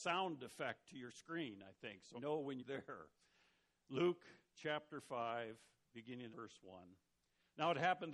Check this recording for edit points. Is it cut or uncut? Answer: cut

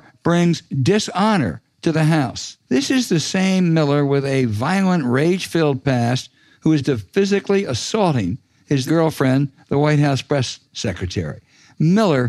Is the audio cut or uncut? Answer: cut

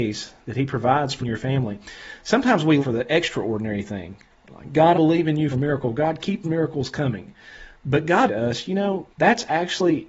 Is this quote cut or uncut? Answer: cut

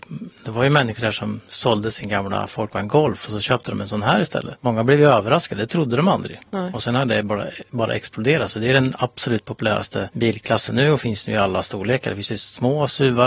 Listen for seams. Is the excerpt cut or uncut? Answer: uncut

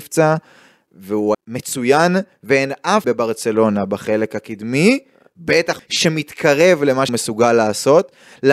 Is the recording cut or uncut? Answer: cut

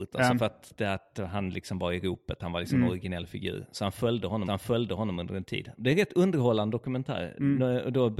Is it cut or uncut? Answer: cut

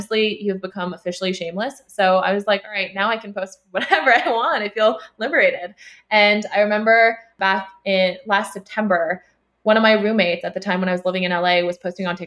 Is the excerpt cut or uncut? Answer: uncut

